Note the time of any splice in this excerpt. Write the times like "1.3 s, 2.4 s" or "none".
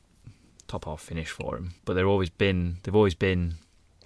1.8 s